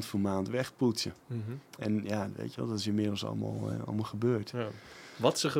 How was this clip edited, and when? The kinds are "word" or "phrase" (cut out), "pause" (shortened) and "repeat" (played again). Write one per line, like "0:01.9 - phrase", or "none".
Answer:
none

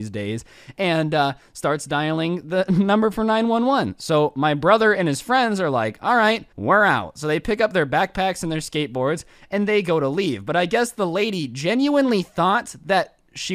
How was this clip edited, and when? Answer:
0:06.5 - pause

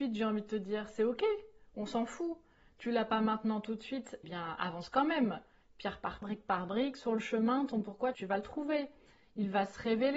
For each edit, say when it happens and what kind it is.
0:04.2 - word
0:06.2 - word

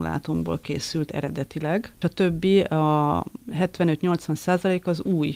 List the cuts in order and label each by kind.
0:02.0 - word

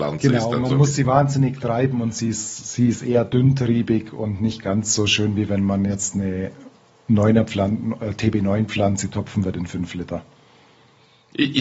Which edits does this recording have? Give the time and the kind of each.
none

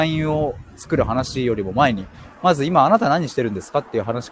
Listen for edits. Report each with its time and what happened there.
none

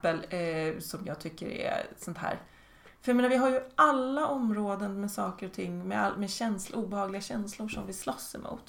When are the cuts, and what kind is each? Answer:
none

